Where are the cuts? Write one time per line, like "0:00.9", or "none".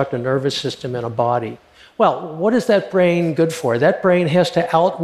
none